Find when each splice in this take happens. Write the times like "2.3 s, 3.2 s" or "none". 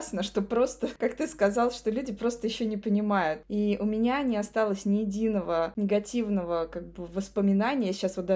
none